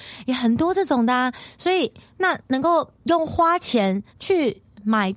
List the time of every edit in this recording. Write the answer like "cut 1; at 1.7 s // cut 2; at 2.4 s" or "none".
cut 1; at 2.9 s // cut 2; at 4.1 s